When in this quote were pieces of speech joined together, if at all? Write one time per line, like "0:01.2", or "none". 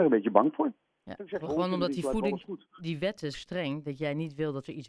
0:01.4
0:02.8
0:03.3